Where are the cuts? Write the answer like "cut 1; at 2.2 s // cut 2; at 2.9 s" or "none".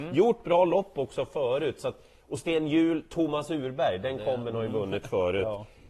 none